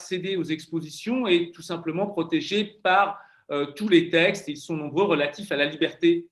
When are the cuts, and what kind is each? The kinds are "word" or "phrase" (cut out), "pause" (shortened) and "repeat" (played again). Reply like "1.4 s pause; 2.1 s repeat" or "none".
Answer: none